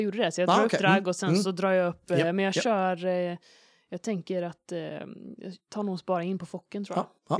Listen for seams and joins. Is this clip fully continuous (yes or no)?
yes